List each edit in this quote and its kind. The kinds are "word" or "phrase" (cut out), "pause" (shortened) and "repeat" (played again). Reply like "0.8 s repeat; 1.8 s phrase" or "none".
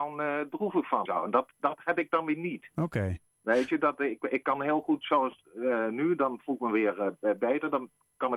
1.1 s word